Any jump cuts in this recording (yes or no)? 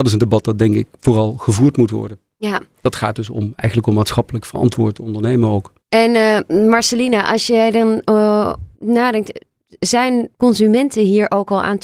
yes